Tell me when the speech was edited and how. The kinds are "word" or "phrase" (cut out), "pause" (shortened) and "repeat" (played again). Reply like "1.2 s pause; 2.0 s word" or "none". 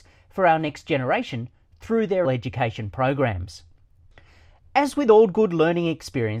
2.2 s word

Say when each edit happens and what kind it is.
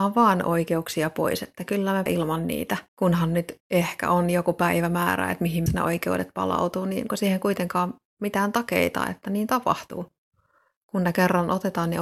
2.1 s word; 2.9 s pause; 3.6 s pause; 5.7 s word; 7.1 s word

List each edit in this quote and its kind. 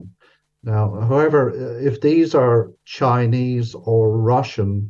none

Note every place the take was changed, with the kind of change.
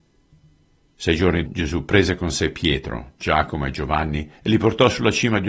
1.5 s word; 4.3 s pause

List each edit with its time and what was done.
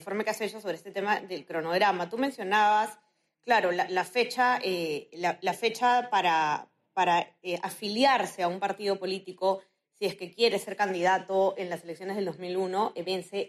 none

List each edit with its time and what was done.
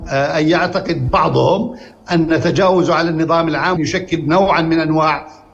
3.8 s phrase

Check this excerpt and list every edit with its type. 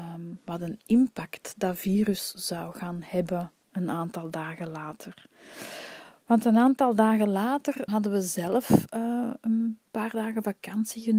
7.9 s word

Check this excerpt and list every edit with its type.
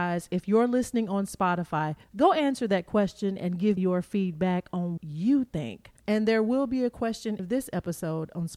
2.0 s pause; 3.8 s word; 5.0 s word; 6.0 s pause; 7.4 s phrase

